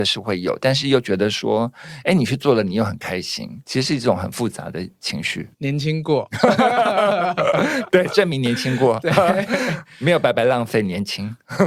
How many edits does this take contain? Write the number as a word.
one